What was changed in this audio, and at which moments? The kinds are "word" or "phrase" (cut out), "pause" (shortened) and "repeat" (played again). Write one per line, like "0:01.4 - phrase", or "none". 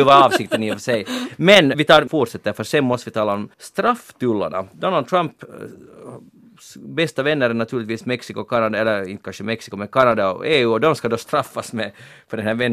0:01.7 - word
0:02.1 - phrase
0:03.5 - pause